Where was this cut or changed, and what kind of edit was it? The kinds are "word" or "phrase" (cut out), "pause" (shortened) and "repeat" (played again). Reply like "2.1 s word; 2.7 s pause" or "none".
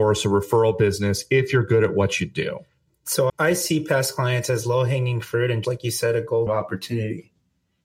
3.3 s word; 5.6 s word; 6.5 s phrase

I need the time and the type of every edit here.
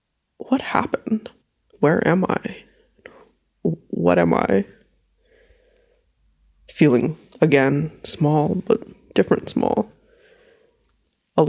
1.4 s pause

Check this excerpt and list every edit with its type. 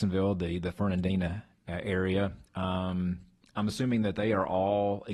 none

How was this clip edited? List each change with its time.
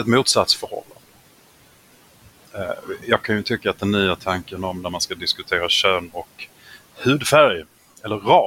none

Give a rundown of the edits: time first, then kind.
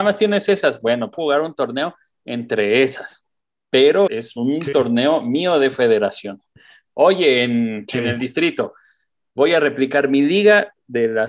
1.1 s phrase; 4.1 s word

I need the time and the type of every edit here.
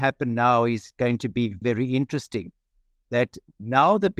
1.6 s word

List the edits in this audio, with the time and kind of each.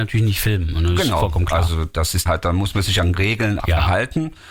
2.3 s word; 3.1 s word; 3.6 s word

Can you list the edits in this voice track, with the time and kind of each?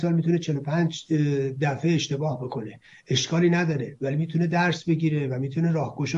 none

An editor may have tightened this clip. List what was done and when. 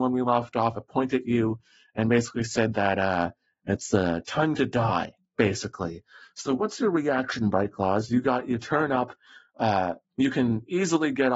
none

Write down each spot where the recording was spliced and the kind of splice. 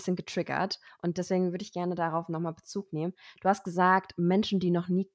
none

